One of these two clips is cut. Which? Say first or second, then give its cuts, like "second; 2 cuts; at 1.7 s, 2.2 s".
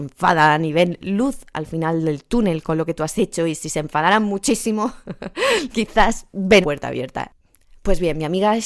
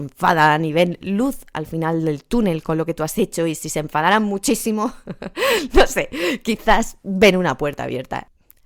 first; 2 cuts; at 5.7 s, 6.6 s